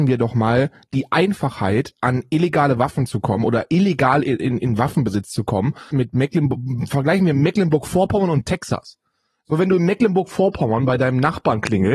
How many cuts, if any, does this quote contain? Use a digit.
1